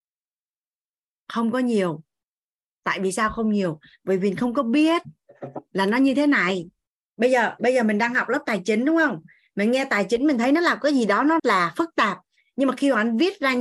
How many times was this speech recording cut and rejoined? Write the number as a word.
one